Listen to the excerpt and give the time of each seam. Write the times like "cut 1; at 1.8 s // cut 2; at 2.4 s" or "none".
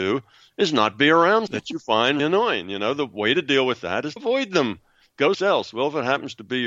cut 1; at 1.5 s // cut 2; at 2.2 s // cut 3; at 4.2 s // cut 4; at 5.3 s

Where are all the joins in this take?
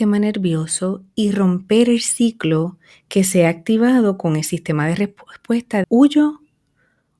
cut 1; at 5.8 s

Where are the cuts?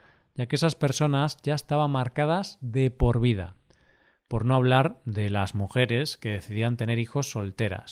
none

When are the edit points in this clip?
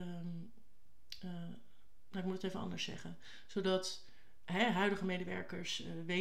none

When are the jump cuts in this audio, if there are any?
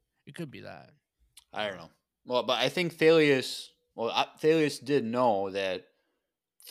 none

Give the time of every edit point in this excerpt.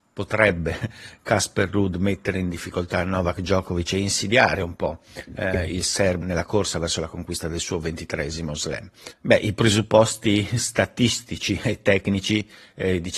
cut 1; at 6.2 s

